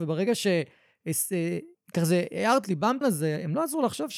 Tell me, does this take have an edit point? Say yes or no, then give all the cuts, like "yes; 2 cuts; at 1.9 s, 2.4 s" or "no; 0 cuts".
yes; 3 cuts; at 1.7 s, 2.6 s, 3.0 s